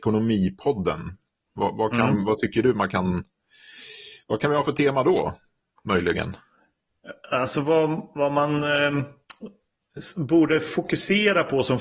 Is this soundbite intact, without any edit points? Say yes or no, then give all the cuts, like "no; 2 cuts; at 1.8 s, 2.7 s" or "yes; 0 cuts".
yes; 0 cuts